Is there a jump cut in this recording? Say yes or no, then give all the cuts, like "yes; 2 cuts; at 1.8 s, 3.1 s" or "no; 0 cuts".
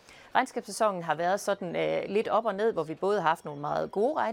no; 0 cuts